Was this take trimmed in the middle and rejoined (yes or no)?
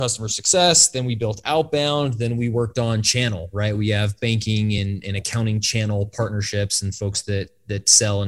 no